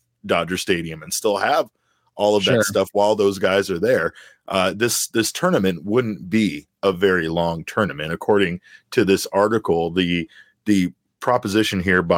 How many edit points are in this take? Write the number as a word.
zero